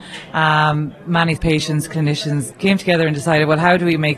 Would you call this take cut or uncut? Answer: cut